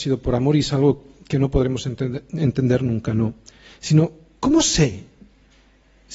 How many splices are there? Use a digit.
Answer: 0